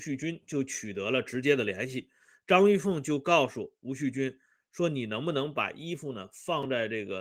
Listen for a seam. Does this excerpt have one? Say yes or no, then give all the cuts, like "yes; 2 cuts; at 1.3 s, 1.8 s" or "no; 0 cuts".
no; 0 cuts